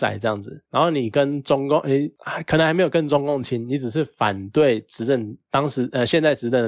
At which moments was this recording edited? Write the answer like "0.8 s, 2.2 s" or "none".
none